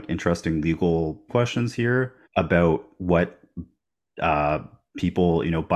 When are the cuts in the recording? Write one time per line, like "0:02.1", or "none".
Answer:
0:01.3
0:02.2